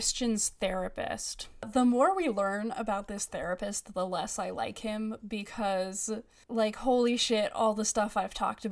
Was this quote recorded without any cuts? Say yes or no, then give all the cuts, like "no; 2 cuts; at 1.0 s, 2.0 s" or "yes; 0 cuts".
yes; 0 cuts